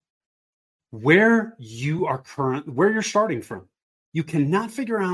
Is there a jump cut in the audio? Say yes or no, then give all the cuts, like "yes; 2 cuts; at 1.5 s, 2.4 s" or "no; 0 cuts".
no; 0 cuts